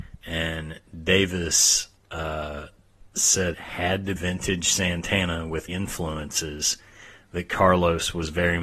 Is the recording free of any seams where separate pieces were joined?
no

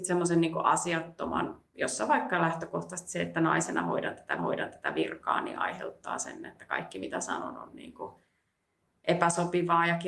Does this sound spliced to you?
yes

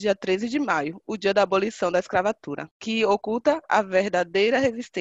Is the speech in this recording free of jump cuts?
yes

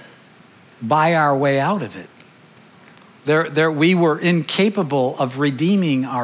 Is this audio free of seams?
yes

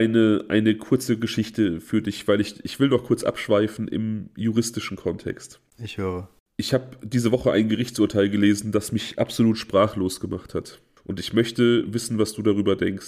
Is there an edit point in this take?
no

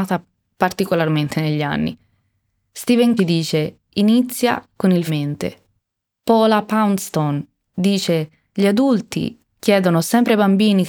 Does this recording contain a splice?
yes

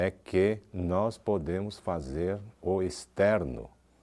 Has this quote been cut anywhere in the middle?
no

